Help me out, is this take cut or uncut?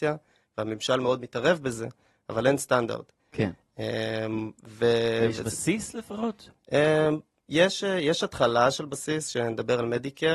uncut